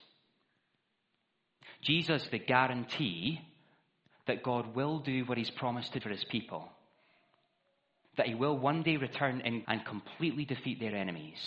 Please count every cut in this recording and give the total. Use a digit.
3